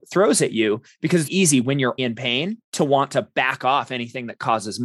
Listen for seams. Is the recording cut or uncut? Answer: cut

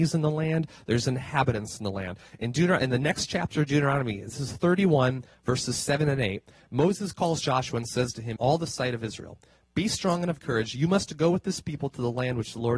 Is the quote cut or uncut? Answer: cut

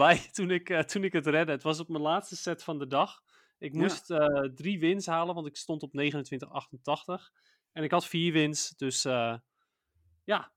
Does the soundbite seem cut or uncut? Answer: uncut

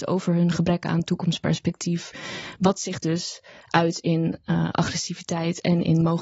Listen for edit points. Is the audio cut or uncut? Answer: uncut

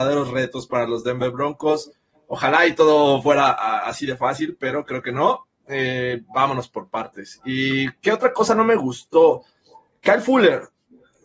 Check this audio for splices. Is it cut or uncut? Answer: uncut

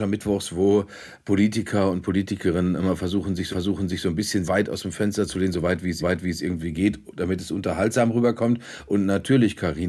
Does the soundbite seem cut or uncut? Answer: cut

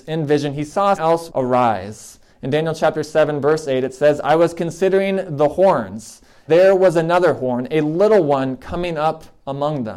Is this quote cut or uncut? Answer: cut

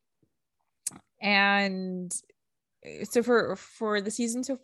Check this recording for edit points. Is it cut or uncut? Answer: uncut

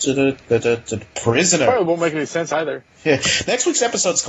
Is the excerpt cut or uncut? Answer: uncut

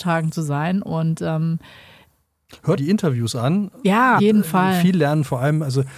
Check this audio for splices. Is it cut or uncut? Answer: cut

